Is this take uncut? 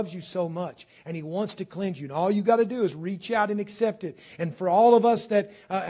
yes; 0 cuts

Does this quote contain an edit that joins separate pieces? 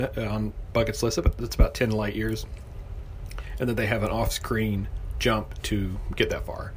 no; 0 cuts

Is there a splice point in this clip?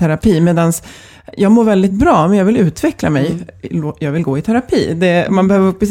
no; 0 cuts

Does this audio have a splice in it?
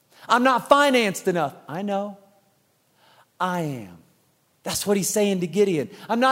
no; 0 cuts

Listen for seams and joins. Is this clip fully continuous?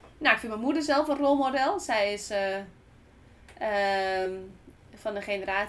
yes; 0 cuts

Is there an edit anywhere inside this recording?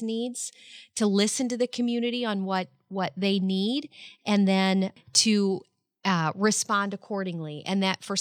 no; 0 cuts

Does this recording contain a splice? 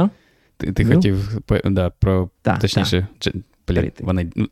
yes; 1 cut; at 3.1 s

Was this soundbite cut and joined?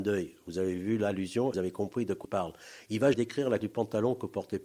yes; 4 cuts; at 1.5 s, 2.2 s, 3.1 s, 3.6 s

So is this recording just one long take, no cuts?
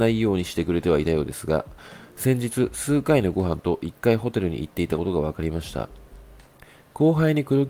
yes; 0 cuts

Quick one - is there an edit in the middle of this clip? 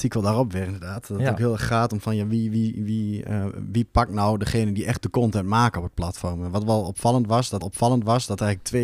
yes; 1 cut; at 7.6 s

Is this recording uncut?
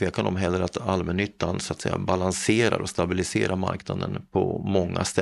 yes; 0 cuts

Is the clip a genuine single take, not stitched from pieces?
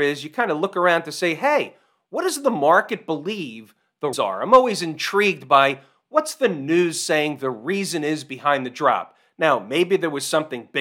no; 1 cut; at 4.1 s

